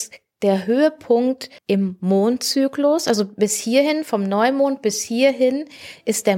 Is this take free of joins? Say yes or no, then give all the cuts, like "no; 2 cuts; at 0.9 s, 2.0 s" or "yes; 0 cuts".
no; 1 cut; at 1.6 s